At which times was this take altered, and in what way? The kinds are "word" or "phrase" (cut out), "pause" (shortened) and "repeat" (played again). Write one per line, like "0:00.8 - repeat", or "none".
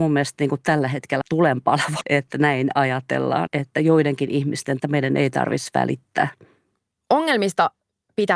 0:01.2 - word
0:02.0 - word
0:03.5 - word
0:04.8 - word